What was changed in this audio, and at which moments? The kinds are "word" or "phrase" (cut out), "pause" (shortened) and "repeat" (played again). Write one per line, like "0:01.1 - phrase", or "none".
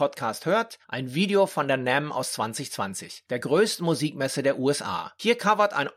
none